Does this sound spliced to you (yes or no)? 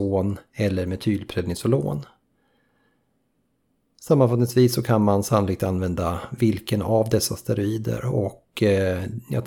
no